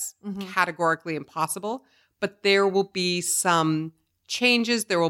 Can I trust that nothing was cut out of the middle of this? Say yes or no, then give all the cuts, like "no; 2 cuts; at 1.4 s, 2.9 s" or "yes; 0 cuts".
yes; 0 cuts